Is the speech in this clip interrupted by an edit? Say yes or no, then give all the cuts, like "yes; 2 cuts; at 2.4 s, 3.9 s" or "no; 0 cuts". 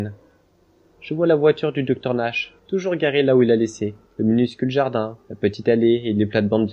yes; 3 cuts; at 2.6 s, 4.0 s, 5.2 s